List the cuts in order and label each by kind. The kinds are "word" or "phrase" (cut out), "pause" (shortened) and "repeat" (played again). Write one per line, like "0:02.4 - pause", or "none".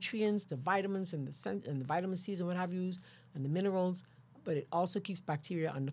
none